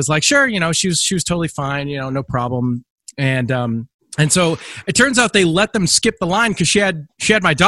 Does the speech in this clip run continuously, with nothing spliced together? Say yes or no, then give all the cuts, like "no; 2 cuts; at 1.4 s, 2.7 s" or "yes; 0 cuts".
no; 1 cut; at 4.0 s